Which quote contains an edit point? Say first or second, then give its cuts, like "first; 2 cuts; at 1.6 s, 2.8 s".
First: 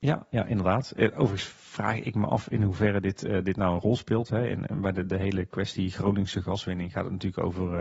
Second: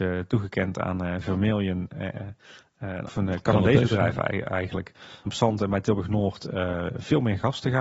second; 2 cuts; at 3.1 s, 5.3 s